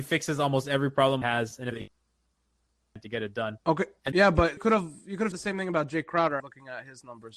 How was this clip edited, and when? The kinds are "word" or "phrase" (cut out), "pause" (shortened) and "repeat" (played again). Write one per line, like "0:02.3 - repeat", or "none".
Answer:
0:01.2 - word
0:01.7 - phrase
0:03.6 - pause
0:04.1 - word
0:04.6 - word
0:05.3 - word
0:06.4 - word